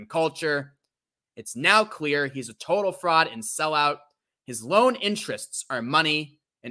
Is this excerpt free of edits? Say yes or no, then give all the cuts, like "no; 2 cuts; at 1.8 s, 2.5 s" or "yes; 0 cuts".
yes; 0 cuts